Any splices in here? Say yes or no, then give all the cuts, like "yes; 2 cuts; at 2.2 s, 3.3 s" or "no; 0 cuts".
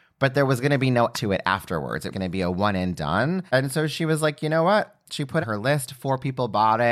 yes; 4 cuts; at 1.1 s, 2.1 s, 3.5 s, 5.4 s